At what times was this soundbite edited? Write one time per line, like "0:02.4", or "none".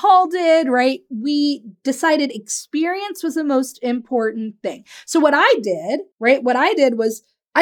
0:06.1